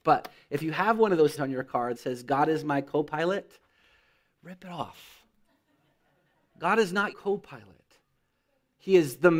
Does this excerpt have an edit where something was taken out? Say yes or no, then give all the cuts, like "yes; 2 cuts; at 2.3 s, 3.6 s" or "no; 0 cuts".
yes; 3 cuts; at 1.4 s, 1.9 s, 7.1 s